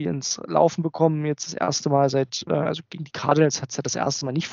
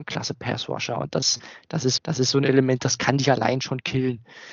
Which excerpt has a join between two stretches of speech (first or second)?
second